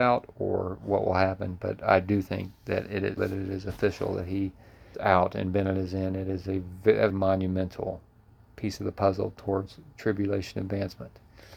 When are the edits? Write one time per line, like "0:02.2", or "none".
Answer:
0:03.2
0:04.9
0:07.1